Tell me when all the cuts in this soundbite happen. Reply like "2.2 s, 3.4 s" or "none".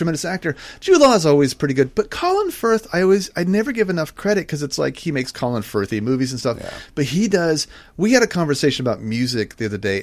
none